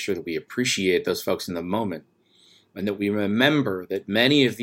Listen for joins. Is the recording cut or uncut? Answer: uncut